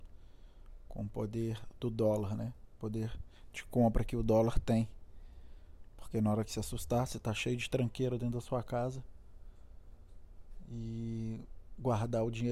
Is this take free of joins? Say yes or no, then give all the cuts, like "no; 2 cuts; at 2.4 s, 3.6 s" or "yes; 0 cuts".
yes; 0 cuts